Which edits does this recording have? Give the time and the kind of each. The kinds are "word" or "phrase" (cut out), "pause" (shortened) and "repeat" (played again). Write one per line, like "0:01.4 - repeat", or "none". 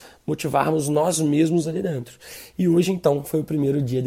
none